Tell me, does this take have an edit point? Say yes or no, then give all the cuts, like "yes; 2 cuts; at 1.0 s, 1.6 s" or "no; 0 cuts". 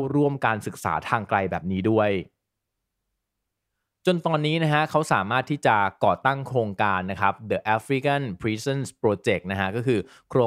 no; 0 cuts